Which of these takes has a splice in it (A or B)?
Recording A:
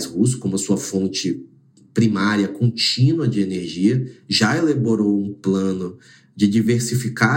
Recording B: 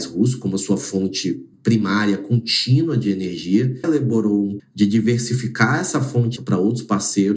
B